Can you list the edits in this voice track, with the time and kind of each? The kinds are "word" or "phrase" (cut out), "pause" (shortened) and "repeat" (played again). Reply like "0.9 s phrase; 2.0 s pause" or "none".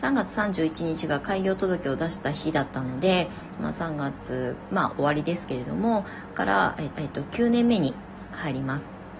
7.0 s repeat

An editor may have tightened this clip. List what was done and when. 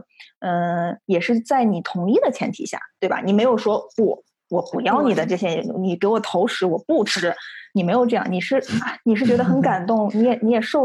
7.7 s pause

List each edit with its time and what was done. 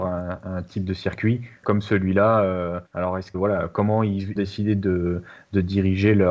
1.6 s word; 2.9 s pause; 3.3 s word; 4.4 s phrase

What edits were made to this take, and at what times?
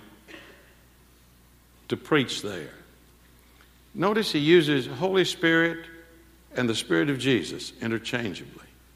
none

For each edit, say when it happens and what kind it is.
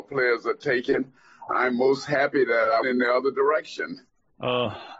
2.8 s word

